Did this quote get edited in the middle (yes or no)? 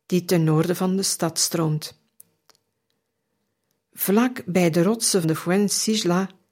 yes